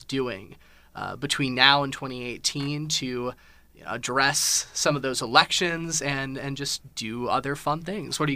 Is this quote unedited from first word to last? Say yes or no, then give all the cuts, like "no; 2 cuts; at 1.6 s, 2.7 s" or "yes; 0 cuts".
yes; 0 cuts